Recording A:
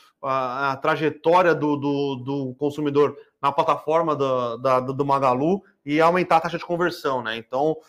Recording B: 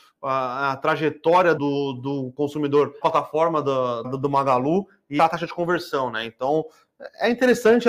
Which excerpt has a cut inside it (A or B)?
B